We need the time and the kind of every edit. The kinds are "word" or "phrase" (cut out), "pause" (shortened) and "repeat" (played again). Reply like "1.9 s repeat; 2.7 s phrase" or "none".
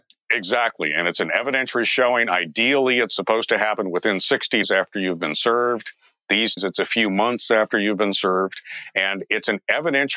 4.6 s word; 6.6 s word